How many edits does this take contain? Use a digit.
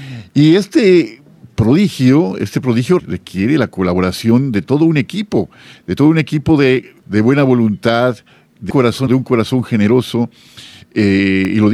4